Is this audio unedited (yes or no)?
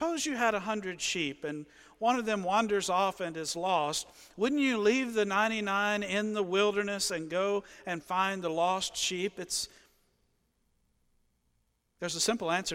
yes